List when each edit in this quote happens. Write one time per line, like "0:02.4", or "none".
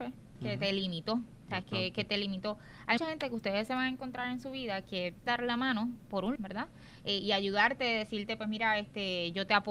0:03.0
0:05.3
0:06.4